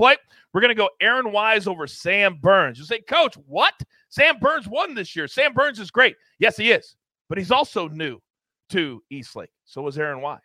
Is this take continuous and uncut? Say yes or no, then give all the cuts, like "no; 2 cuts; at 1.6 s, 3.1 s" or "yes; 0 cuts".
yes; 0 cuts